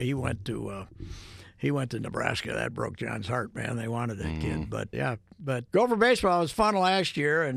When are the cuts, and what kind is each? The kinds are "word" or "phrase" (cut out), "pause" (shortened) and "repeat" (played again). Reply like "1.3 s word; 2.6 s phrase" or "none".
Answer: 4.9 s word; 5.7 s word